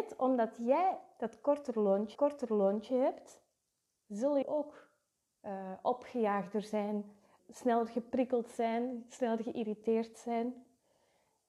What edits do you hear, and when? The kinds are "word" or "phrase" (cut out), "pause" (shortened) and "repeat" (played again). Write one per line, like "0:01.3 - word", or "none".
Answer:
0:02.2 - repeat
0:04.4 - phrase
0:07.4 - word

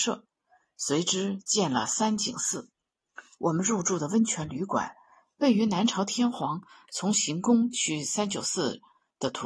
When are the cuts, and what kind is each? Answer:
none

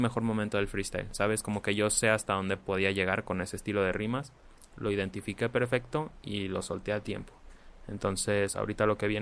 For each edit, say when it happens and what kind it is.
none

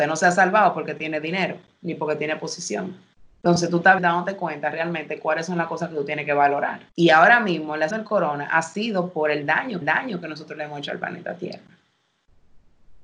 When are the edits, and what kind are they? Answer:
0:03.1 - pause
0:04.0 - word
0:06.9 - pause
0:07.9 - word
0:09.8 - repeat

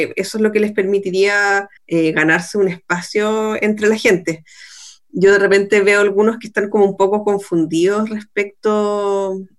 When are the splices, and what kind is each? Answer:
0:01.8 - pause

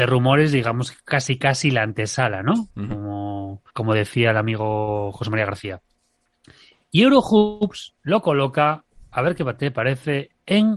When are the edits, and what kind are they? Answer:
0:02.7 - pause
0:03.7 - pause
0:08.0 - pause

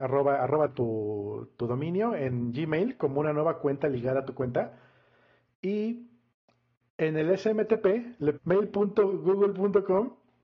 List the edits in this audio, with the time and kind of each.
0:01.6 - word
0:08.4 - word

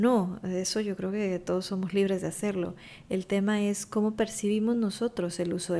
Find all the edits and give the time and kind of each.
none

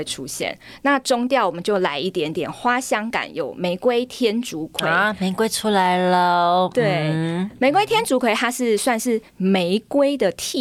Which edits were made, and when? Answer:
0:09.3 - pause

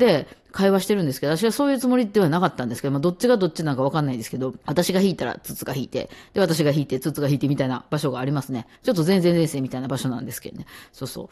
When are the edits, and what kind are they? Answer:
0:04.6 - pause
0:08.7 - pause

